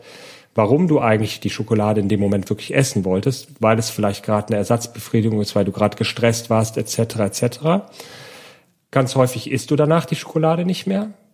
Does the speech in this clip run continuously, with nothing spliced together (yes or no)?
yes